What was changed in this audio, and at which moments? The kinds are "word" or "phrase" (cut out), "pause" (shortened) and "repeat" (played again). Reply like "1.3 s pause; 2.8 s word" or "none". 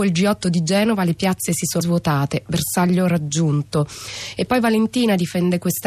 1.8 s word

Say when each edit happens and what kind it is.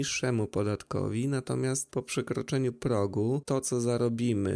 none

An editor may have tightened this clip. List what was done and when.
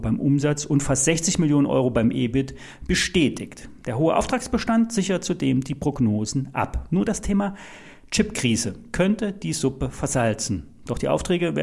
none

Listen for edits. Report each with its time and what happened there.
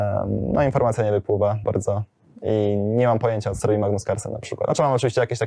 1.6 s word; 3.6 s word

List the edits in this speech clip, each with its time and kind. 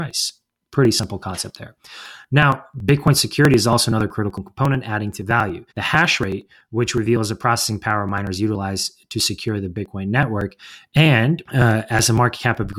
5.7 s pause; 11.4 s pause

